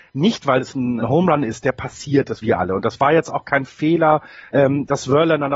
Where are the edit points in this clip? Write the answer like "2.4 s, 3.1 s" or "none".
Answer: 1.0 s, 2.4 s